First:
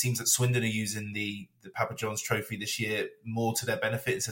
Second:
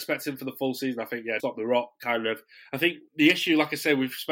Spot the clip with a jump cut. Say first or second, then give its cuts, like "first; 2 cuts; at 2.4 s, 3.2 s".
second; 2 cuts; at 1.4 s, 3.1 s